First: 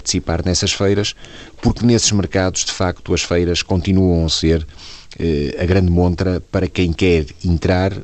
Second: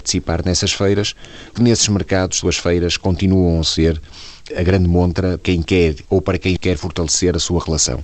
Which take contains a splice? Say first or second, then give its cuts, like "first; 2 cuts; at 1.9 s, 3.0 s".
second; 6 cuts; at 1.6 s, 2.4 s, 4.5 s, 5.4 s, 6.0 s, 6.6 s